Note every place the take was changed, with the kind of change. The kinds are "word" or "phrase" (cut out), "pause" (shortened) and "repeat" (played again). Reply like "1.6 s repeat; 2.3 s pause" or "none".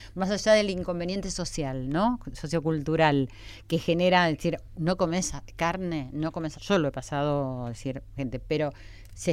4.7 s word; 6.5 s word; 8.2 s word